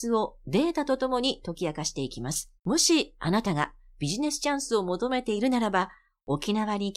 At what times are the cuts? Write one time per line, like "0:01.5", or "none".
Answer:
0:02.6